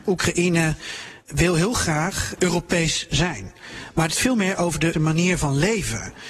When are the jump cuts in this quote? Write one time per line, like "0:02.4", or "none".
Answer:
0:01.2
0:02.4
0:04.1
0:04.9